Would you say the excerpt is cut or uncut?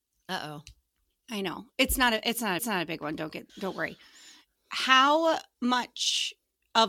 cut